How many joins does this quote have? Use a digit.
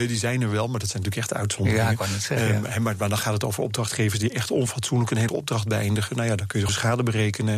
2